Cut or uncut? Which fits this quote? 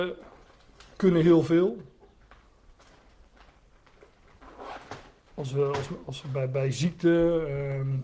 uncut